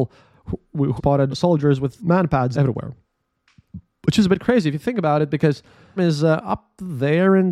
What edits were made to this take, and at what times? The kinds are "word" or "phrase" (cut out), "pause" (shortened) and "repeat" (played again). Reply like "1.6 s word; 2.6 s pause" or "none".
1.0 s word; 1.3 s word; 2.0 s word; 2.5 s word; 6.0 s word